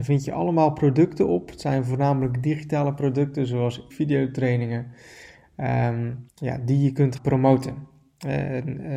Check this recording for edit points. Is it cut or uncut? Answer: cut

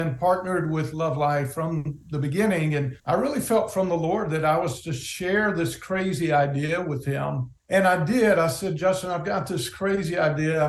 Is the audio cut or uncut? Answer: cut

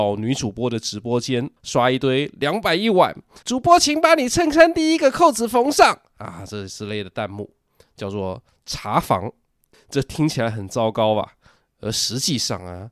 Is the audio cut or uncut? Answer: cut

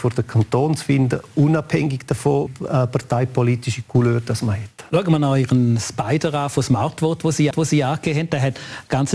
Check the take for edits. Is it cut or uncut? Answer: cut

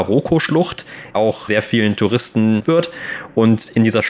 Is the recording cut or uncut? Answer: cut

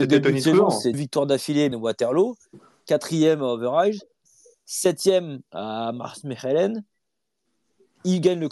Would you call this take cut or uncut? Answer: cut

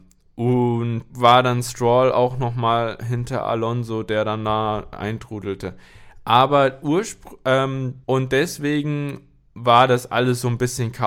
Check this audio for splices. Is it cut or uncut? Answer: cut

